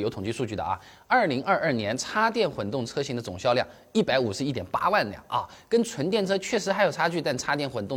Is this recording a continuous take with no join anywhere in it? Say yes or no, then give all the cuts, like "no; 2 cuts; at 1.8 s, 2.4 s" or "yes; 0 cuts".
yes; 0 cuts